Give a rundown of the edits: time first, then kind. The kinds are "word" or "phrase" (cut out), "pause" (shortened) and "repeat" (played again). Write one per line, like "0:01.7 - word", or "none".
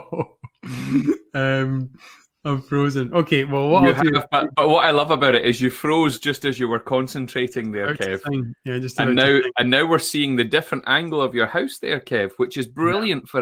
none